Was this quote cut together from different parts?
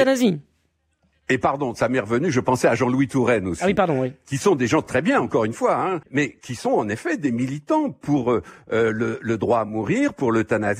yes; 1 cut; at 6.0 s

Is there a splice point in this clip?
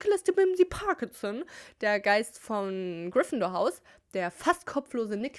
no; 0 cuts

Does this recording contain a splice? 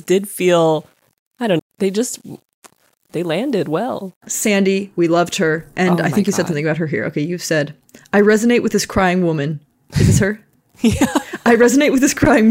yes; 1 cut; at 1.6 s

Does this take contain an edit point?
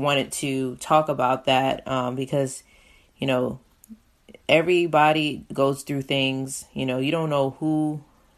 no; 0 cuts

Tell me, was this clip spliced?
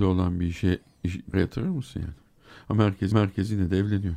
yes; 2 cuts; at 1.3 s, 3.1 s

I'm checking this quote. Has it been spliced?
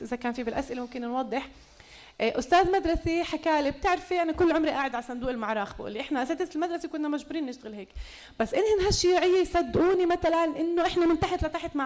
no; 0 cuts

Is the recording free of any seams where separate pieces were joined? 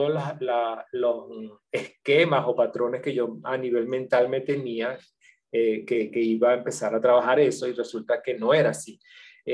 yes; 0 cuts

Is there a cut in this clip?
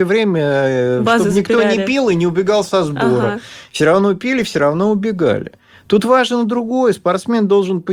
no; 0 cuts

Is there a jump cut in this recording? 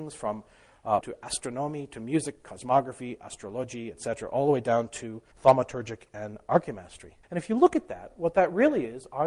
yes; 3 cuts; at 1.0 s, 5.3 s, 7.2 s

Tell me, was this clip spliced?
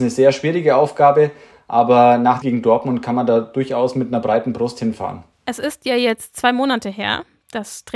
yes; 2 cuts; at 2.4 s, 5.3 s

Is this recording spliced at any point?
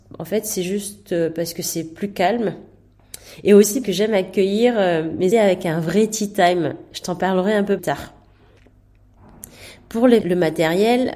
yes; 4 cuts; at 3.8 s, 5.3 s, 7.8 s, 10.2 s

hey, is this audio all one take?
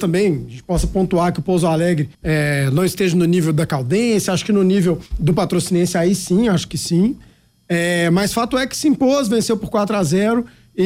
no; 2 cuts; at 2.1 s, 5.1 s

